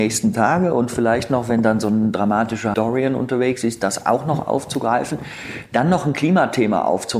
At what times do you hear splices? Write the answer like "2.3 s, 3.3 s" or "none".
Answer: 2.7 s